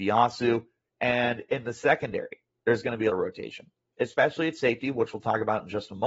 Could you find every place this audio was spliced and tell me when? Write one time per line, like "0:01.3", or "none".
0:03.1